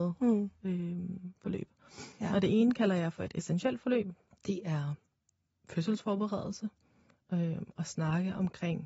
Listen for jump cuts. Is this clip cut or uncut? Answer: cut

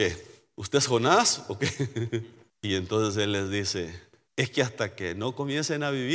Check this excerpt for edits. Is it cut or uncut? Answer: uncut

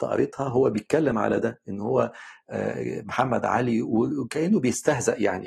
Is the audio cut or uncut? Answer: uncut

